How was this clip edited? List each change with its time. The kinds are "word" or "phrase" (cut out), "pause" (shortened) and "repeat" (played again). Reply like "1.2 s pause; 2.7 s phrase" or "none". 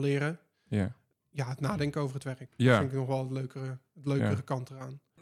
none